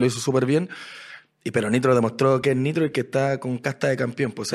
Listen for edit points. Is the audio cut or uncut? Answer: uncut